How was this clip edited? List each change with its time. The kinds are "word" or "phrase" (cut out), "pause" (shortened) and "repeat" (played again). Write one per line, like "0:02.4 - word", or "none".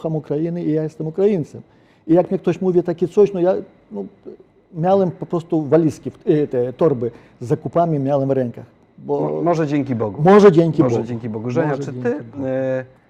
none